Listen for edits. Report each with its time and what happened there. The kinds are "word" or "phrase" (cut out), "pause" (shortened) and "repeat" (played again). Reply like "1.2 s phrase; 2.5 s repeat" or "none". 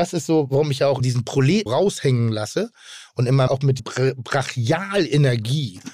1.0 s word; 1.7 s word; 3.5 s word; 3.8 s word